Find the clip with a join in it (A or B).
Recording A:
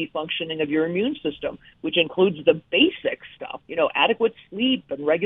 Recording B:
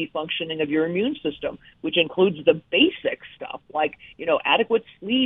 A